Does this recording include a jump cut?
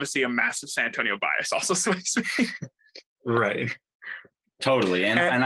no; 0 cuts

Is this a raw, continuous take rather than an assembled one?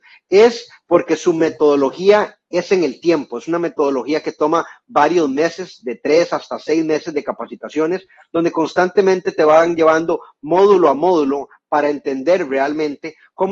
yes; 0 cuts

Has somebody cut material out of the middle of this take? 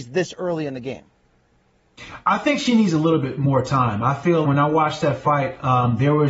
yes; 1 cut; at 4.4 s

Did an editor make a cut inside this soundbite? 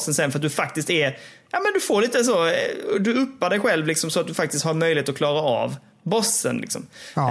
no; 0 cuts

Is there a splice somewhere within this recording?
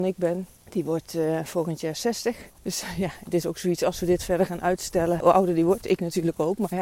no; 0 cuts

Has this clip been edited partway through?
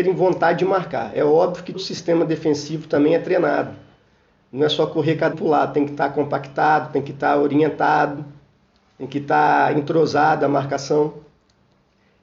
yes; 2 cuts; at 1.7 s, 5.3 s

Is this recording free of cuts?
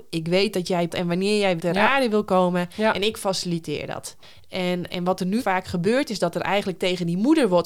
no; 4 cuts; at 0.9 s, 1.6 s, 4.9 s, 5.4 s

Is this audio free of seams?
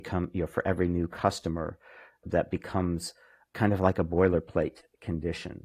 yes; 0 cuts

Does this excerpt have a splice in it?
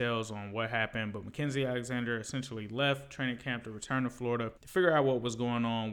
yes; 1 cut; at 4.6 s

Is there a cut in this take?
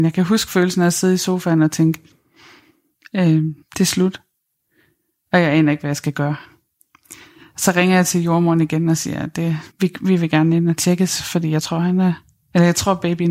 yes; 2 cuts; at 3.6 s, 9.7 s

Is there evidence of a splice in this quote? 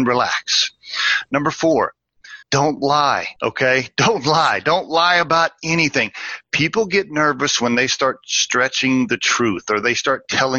yes; 2 cuts; at 2.4 s, 3.4 s

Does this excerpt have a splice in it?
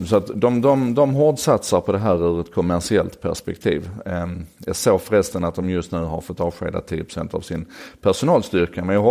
no; 0 cuts

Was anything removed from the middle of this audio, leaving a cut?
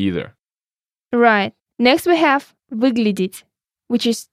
yes; 2 cuts; at 1.6 s, 2.6 s

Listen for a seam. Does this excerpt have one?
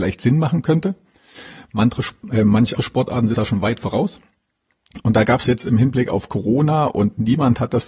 yes; 3 cuts; at 2.8 s, 3.3 s, 5.5 s

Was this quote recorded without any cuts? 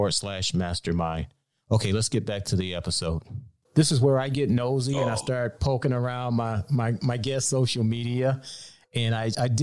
yes; 0 cuts

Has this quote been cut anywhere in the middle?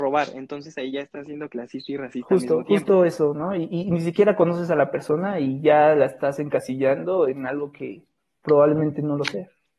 no; 0 cuts

